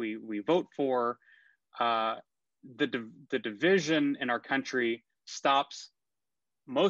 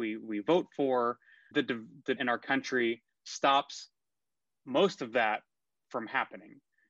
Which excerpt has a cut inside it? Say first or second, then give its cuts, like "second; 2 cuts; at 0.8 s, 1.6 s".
second; 2 cuts; at 1.5 s, 2.2 s